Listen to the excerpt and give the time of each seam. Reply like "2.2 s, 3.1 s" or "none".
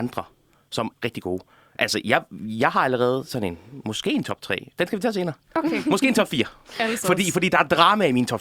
0.9 s